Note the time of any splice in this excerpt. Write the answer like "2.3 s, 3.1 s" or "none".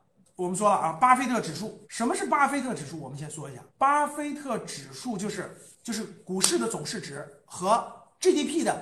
1.8 s, 3.7 s